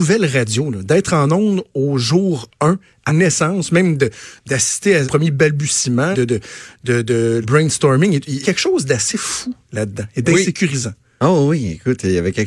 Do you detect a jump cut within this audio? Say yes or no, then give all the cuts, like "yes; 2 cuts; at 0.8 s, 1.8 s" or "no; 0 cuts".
yes; 5 cuts; at 3.1 s, 5.0 s, 6.1 s, 7.4 s, 8.4 s